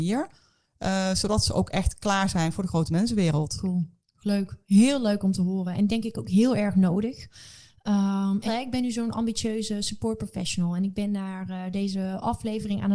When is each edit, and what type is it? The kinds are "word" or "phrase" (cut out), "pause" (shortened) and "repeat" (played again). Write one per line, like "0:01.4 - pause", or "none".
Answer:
0:08.5 - word